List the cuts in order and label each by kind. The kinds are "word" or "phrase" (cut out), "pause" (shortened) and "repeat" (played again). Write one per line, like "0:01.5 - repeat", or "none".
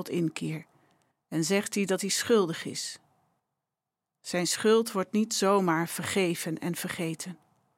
none